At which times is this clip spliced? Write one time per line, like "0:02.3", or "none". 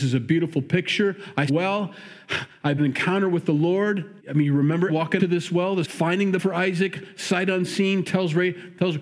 0:01.5
0:02.8
0:04.2
0:04.9
0:05.2
0:05.8
0:06.4

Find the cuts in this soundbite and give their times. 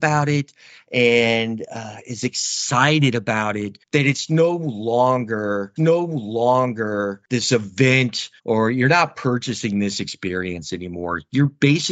0:03.8
0:05.8
0:08.4

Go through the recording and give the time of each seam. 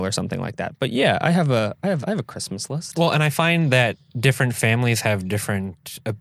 0:02.0

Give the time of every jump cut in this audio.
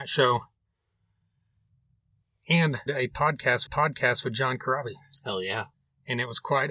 0:02.9
0:03.7
0:05.7

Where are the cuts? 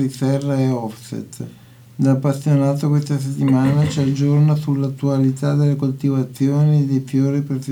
none

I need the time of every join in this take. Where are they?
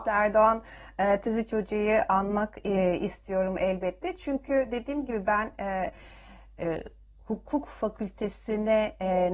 none

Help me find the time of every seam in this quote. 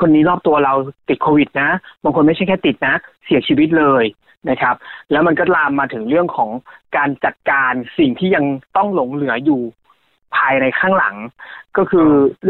none

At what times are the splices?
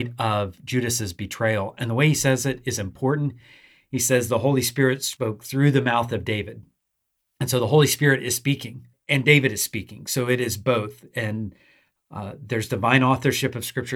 none

